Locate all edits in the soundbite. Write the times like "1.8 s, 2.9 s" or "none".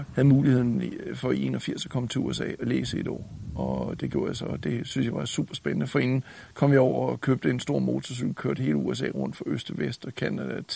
none